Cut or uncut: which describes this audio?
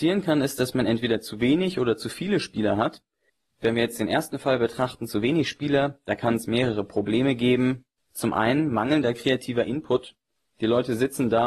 uncut